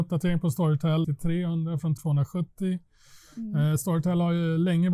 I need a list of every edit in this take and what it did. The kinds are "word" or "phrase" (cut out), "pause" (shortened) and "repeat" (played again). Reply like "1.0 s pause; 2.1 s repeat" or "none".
1.0 s phrase; 2.0 s word